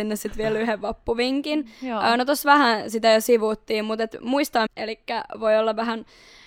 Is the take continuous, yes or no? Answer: no